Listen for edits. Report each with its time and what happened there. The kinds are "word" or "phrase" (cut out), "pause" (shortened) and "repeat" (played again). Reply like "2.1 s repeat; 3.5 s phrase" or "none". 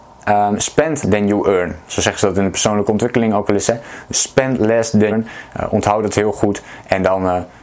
1.0 s word; 5.1 s word